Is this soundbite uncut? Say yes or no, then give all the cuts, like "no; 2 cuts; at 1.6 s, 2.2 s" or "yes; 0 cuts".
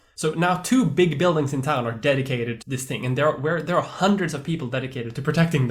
no; 1 cut; at 2.6 s